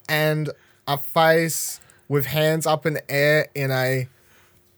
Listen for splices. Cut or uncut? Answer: uncut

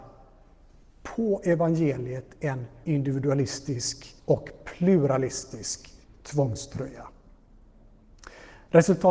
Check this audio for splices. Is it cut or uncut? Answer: cut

